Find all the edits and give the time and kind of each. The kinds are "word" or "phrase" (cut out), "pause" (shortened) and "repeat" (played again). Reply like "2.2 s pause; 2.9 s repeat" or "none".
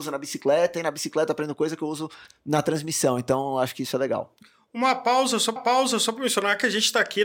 5.6 s repeat